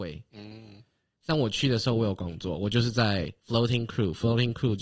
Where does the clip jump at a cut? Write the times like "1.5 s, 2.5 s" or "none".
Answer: 3.4 s